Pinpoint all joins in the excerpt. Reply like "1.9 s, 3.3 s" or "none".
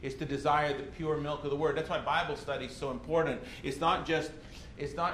none